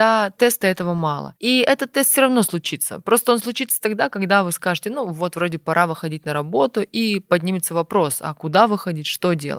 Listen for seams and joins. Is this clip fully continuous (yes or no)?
yes